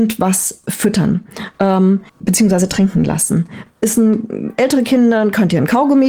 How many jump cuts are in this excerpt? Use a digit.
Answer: 1